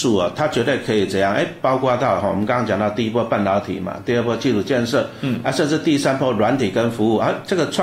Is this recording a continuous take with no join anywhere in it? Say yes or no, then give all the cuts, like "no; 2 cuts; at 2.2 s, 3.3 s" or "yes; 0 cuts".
yes; 0 cuts